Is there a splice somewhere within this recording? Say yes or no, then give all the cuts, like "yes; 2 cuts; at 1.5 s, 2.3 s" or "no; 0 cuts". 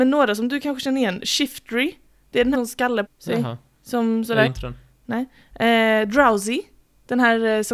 yes; 3 cuts; at 2.5 s, 3.1 s, 4.5 s